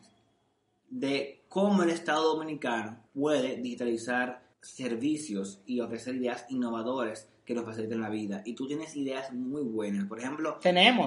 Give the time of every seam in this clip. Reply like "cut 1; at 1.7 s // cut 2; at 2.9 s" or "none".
cut 1; at 3.1 s // cut 2; at 4.5 s